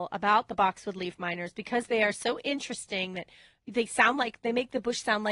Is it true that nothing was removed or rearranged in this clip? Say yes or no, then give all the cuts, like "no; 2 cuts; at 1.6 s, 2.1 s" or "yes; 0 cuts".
yes; 0 cuts